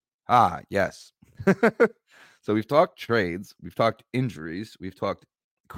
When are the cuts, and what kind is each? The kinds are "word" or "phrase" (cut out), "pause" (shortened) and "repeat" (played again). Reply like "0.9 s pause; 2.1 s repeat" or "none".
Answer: none